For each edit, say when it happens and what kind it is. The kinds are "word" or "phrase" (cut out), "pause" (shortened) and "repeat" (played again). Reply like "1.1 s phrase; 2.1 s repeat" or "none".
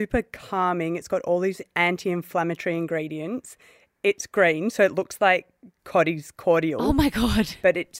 none